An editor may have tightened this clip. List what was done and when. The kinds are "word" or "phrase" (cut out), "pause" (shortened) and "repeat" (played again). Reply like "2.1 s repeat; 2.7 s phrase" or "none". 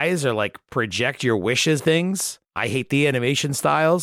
1.8 s word; 2.4 s pause